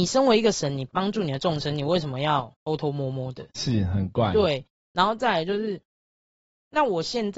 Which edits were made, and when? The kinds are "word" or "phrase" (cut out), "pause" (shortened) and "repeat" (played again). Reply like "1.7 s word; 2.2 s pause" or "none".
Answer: 2.6 s pause